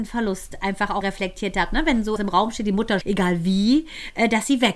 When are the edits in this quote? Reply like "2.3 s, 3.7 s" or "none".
1.0 s, 2.2 s, 3.0 s